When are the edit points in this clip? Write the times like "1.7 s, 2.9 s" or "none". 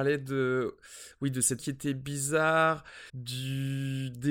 1.6 s, 3.1 s